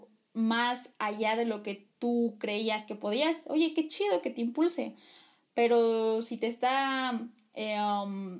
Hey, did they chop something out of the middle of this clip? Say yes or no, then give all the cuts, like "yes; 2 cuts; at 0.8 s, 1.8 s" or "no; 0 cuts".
no; 0 cuts